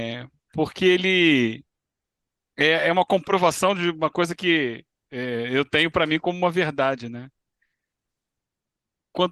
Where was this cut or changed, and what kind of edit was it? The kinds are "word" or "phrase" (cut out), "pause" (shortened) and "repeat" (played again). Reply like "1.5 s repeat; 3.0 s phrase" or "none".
none